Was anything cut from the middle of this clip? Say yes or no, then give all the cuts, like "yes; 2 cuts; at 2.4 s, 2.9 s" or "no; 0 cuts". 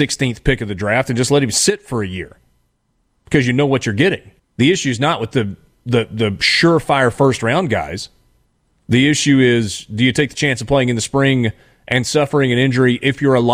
yes; 1 cut; at 4.4 s